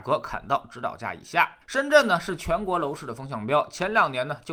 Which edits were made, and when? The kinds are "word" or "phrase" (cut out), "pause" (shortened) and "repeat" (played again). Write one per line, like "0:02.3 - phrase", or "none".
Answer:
0:01.6 - pause